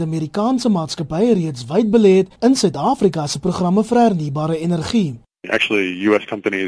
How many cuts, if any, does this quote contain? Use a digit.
1